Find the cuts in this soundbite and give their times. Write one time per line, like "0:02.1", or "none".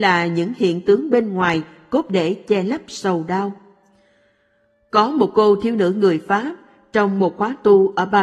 none